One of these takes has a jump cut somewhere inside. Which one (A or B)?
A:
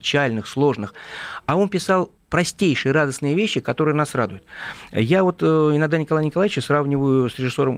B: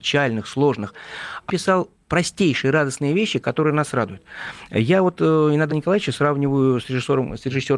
B